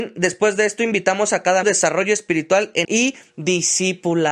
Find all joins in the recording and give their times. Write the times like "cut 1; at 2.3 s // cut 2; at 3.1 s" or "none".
cut 1; at 1.6 s // cut 2; at 2.8 s